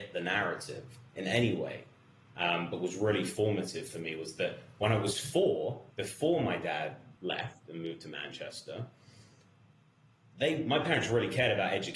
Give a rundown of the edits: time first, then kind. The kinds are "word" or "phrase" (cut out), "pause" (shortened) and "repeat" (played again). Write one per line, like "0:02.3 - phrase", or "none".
0:05.9 - pause
0:07.2 - pause